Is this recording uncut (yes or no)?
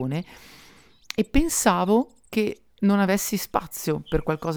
no